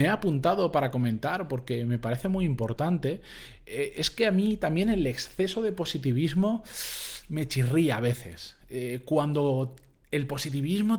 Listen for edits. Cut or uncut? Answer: uncut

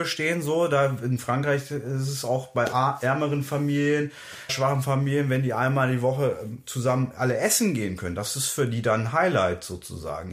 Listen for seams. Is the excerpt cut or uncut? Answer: cut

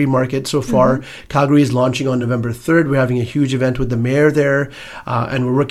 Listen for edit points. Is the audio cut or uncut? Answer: uncut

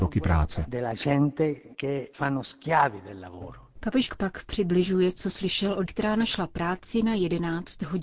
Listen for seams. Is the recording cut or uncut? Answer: cut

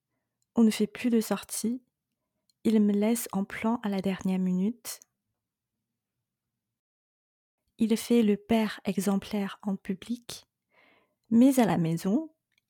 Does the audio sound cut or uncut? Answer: uncut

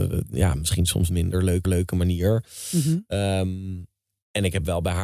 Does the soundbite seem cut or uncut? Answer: cut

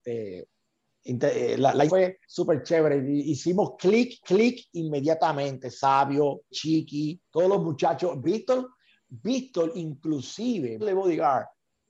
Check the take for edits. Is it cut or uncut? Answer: cut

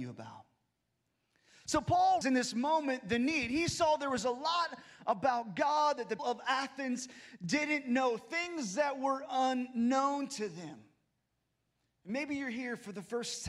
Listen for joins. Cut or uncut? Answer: cut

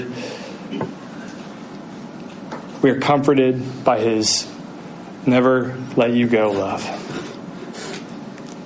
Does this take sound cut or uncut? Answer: uncut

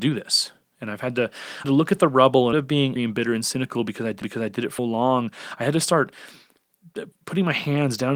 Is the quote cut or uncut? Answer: cut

